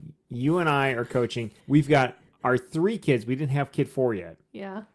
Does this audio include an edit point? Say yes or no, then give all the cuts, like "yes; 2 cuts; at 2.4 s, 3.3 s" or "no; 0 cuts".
yes; 1 cut; at 1.6 s